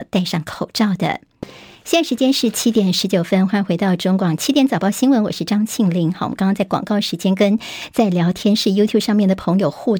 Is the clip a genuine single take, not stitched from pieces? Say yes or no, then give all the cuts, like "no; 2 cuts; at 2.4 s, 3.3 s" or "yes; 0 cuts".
yes; 0 cuts